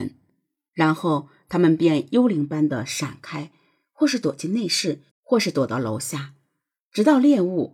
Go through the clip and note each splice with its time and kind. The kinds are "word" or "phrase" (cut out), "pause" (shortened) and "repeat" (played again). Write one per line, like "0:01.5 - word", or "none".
0:05.1 - pause